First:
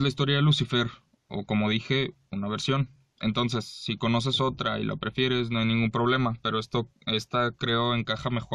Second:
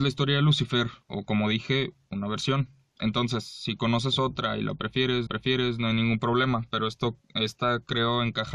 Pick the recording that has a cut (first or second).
second